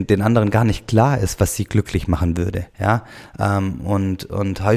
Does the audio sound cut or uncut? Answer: cut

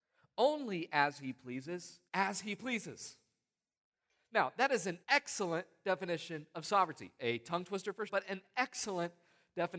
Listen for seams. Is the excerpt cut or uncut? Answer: cut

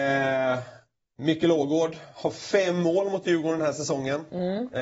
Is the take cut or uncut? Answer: uncut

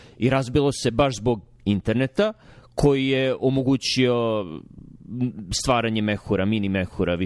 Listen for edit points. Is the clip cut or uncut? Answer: uncut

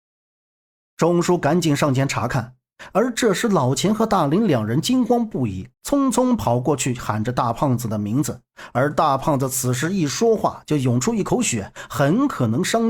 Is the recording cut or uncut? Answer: cut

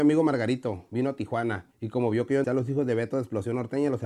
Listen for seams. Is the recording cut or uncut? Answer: cut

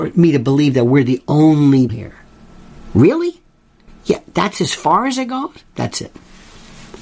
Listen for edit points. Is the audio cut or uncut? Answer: cut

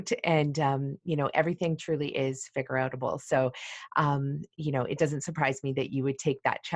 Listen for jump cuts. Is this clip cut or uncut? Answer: uncut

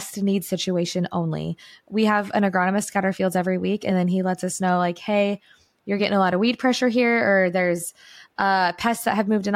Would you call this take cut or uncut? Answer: uncut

